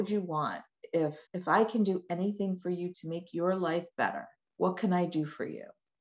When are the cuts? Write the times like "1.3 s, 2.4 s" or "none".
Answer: 1.3 s, 2.9 s, 4.4 s